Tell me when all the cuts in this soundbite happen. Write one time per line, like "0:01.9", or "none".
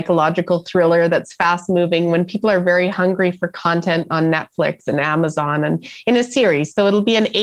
none